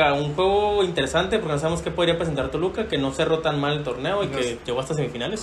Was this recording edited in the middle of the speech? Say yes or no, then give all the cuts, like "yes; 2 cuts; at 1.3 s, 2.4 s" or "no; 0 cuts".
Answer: no; 0 cuts